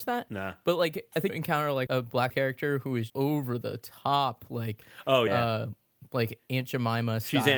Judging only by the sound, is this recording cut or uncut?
cut